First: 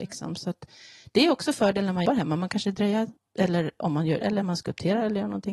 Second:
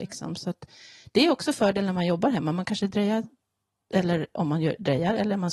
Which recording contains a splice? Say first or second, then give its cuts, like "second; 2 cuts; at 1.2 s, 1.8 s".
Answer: first; 3 cuts; at 2.1 s, 3.2 s, 4.2 s